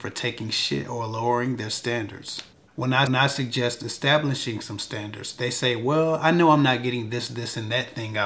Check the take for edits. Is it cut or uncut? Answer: cut